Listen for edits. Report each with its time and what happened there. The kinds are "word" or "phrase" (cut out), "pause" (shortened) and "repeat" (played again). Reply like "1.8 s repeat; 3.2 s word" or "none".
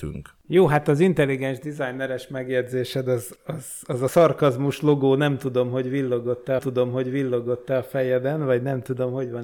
3.4 s word; 4.1 s word; 6.6 s repeat